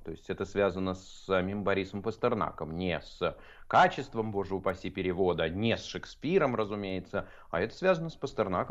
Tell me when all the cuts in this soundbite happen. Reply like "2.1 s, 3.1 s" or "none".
none